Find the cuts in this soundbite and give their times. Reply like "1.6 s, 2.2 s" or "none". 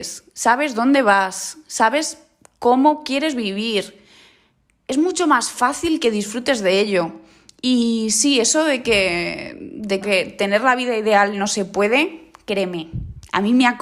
10.0 s